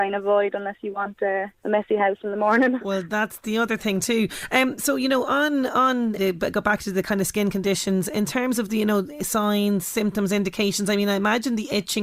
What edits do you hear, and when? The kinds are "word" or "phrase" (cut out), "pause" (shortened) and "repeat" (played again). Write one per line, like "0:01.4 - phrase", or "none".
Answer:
0:01.6 - pause
0:06.2 - word